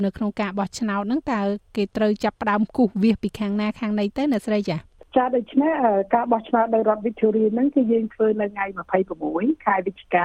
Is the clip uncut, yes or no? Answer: no